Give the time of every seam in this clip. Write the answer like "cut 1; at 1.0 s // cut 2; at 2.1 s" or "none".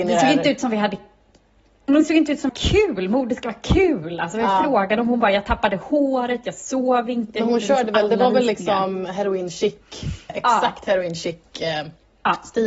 cut 1; at 2.5 s // cut 2; at 10.3 s